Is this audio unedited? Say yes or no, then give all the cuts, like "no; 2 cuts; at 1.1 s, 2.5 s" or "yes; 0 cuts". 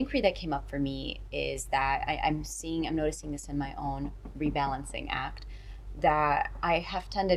yes; 0 cuts